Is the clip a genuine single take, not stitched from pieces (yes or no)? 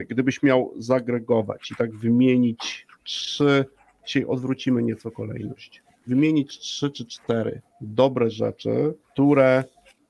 no